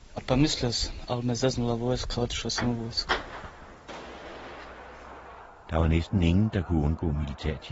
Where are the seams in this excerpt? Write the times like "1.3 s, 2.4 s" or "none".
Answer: none

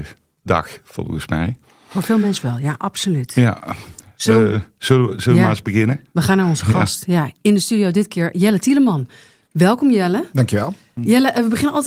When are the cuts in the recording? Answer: none

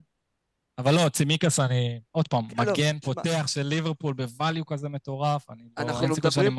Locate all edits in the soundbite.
2.1 s

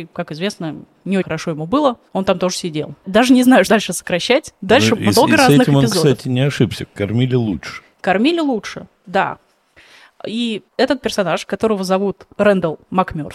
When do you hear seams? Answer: 1.2 s, 2.1 s, 3.7 s, 10.7 s

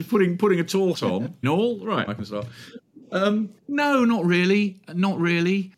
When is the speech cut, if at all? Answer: 0.9 s, 1.4 s, 2.1 s, 3.6 s

